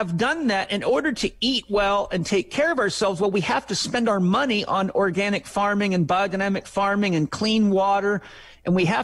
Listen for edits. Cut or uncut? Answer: uncut